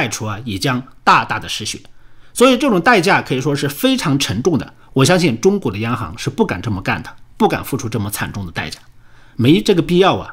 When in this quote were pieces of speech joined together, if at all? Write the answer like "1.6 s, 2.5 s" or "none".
none